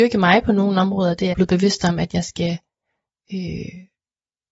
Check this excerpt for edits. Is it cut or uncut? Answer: cut